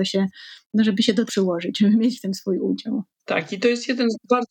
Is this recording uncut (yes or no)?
no